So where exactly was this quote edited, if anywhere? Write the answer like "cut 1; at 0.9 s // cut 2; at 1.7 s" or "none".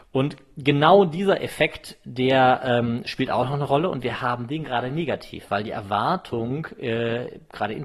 none